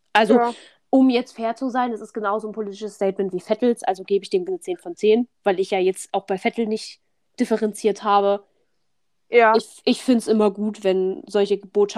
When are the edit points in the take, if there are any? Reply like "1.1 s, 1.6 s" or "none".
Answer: 4.5 s